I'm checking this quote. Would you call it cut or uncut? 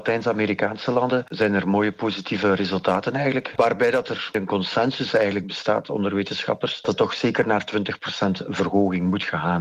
uncut